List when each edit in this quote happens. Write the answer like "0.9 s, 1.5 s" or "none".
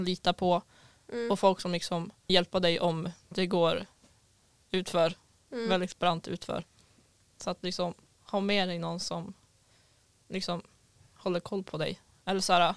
2.3 s